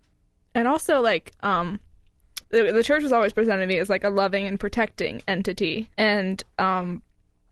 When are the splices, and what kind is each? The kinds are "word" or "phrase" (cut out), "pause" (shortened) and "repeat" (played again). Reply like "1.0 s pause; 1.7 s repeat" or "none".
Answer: 2.4 s pause; 5.9 s pause